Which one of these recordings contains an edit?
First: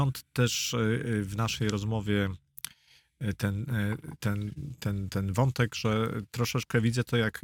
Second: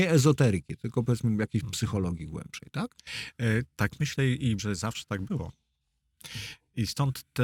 second; 1 cut; at 4.6 s

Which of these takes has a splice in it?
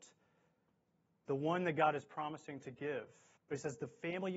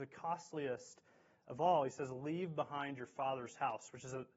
first; 1 cut; at 3.4 s

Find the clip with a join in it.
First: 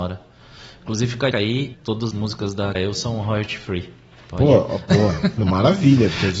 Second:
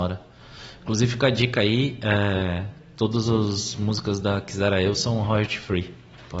first; 5 cuts; at 1.3 s, 1.7 s, 2.1 s, 2.7 s, 5.4 s

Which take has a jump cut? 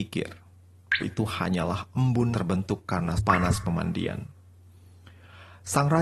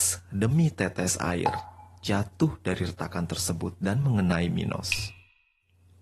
first; 3 cuts; at 1.0 s, 2.3 s, 3.2 s

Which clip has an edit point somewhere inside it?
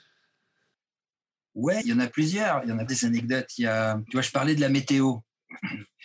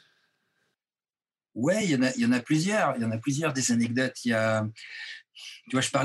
first; 3 cuts; at 1.8 s, 2.9 s, 4.1 s

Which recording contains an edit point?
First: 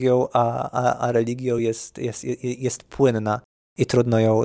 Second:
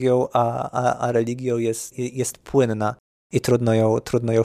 second; 1 cut; at 1.9 s

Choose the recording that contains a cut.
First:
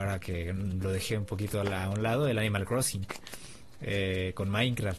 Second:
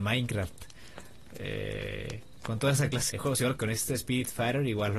second; 2 cuts; at 3.1 s, 3.6 s

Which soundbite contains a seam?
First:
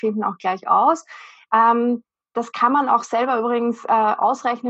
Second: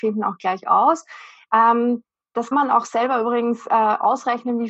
second; 1 cut; at 2.5 s

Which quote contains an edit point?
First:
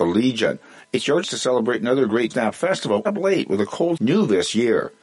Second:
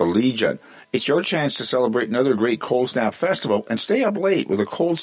first; 4 cuts; at 1.2 s, 2.3 s, 3.0 s, 4.0 s

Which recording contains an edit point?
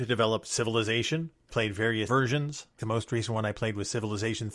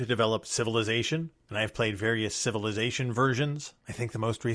first; 3 cuts; at 1.5 s, 2.1 s, 2.8 s

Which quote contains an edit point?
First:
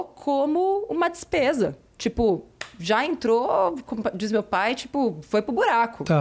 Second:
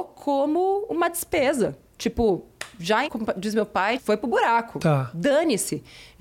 second; 2 cuts; at 3.1 s, 4.0 s

